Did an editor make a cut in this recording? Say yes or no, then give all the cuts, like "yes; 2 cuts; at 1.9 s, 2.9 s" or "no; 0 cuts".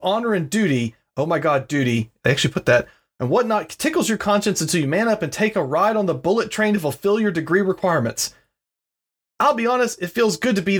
no; 0 cuts